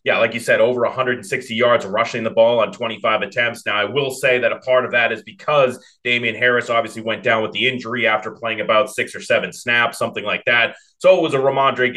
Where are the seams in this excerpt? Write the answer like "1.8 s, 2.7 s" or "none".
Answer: none